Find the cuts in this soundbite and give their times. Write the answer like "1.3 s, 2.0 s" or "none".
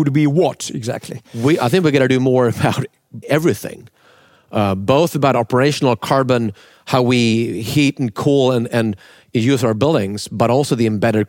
3.2 s